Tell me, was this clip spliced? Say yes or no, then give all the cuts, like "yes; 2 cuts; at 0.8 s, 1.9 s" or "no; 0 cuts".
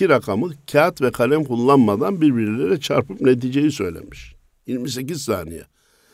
no; 0 cuts